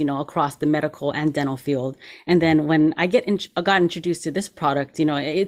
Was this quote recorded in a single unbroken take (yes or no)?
yes